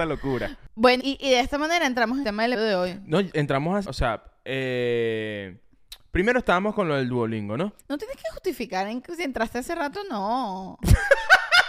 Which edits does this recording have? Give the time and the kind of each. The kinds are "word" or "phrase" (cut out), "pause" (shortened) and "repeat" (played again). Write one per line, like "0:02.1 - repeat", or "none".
0:01.0 - word
0:02.2 - word
0:02.5 - word
0:03.8 - phrase
0:07.8 - pause